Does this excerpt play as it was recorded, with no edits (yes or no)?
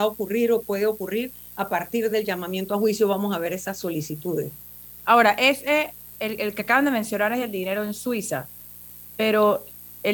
yes